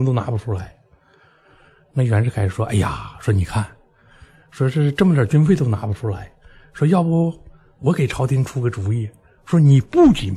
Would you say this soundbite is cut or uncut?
uncut